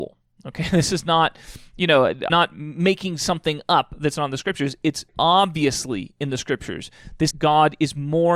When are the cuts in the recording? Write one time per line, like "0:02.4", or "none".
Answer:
0:02.3
0:05.1
0:07.3